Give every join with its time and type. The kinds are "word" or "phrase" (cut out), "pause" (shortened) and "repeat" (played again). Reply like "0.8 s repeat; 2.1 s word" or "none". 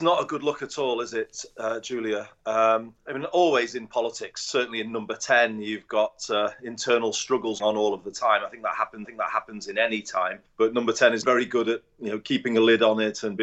3.0 s pause; 7.6 s word; 9.0 s repeat; 10.5 s pause; 11.2 s word